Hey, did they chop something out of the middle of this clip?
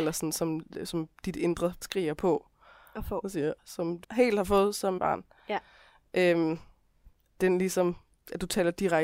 yes; 5 cuts; at 1.8 s, 3.6 s, 4.0 s, 5.0 s, 7.4 s

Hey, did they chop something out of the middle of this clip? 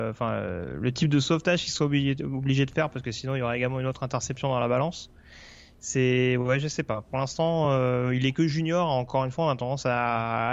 no; 0 cuts

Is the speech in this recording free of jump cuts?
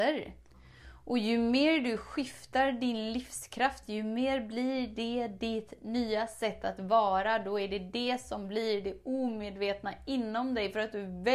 yes; 0 cuts

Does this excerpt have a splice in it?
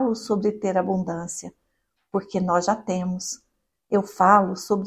no; 0 cuts

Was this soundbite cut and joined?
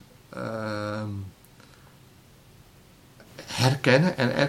yes; 1 cut; at 3.3 s

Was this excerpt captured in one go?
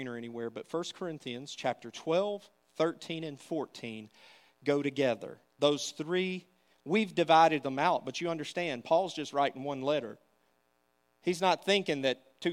yes; 0 cuts

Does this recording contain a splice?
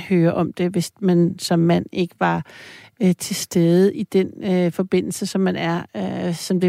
no; 0 cuts

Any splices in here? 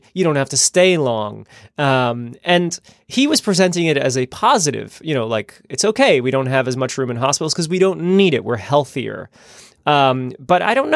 no; 0 cuts

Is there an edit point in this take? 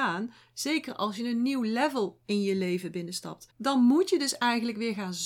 yes; 1 cut; at 3.5 s

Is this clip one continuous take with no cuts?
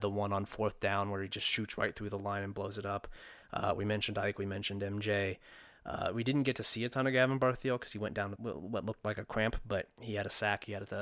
no; 1 cut; at 8.4 s

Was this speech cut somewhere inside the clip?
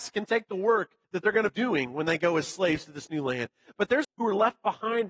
yes; 3 cuts; at 1.0 s, 1.5 s, 4.0 s

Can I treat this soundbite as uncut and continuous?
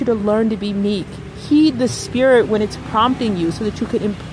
yes; 0 cuts

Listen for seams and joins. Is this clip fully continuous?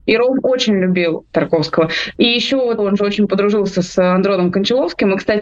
no; 1 cut; at 2.8 s

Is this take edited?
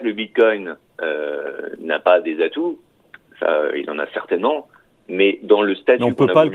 no; 0 cuts

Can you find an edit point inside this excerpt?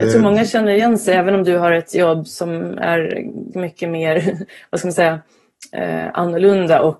yes; 2 cuts; at 2.3 s, 3.5 s

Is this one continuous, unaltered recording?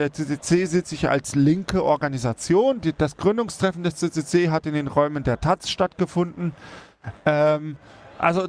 yes; 0 cuts

